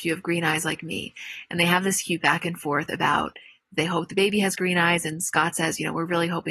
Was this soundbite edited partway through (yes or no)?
no